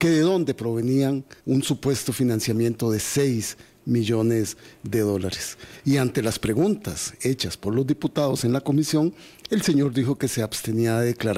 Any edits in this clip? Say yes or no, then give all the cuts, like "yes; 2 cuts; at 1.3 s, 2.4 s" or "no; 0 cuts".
yes; 1 cut; at 1.4 s